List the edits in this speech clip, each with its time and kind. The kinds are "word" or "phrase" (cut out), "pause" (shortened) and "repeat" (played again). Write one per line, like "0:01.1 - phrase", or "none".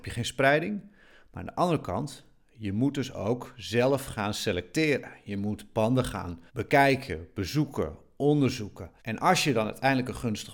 0:06.5 - pause
0:09.0 - pause

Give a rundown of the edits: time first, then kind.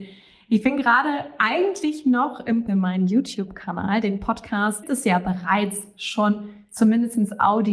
0:02.7 - phrase
0:04.8 - phrase

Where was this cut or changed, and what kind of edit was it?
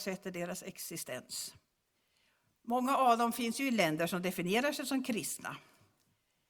none

